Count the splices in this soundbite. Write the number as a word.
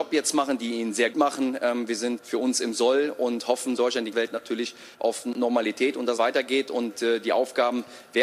six